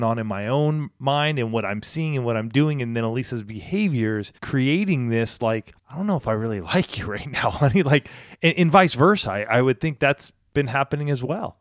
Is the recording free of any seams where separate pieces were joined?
no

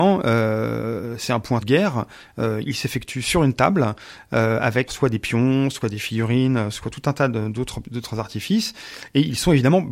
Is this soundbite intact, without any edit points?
no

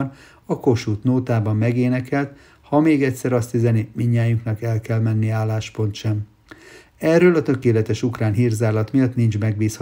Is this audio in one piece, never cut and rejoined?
yes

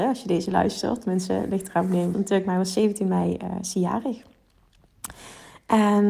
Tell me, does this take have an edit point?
yes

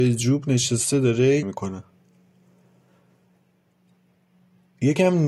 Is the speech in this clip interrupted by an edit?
yes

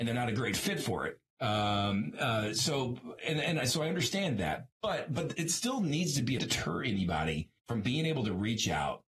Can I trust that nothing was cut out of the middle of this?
no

